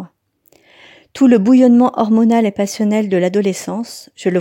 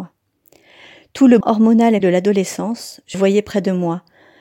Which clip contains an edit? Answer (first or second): second